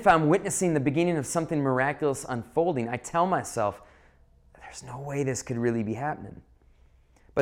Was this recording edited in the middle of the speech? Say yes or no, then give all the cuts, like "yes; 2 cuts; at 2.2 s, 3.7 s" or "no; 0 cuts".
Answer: no; 0 cuts